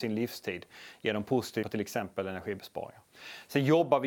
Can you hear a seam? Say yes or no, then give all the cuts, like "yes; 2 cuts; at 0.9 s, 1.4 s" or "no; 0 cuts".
yes; 1 cut; at 1.6 s